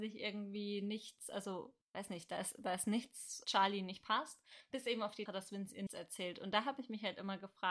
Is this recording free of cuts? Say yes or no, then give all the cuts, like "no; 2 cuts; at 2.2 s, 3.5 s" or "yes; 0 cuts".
no; 4 cuts; at 1.8 s, 3.4 s, 5.3 s, 5.9 s